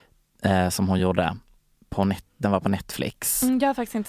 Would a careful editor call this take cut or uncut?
uncut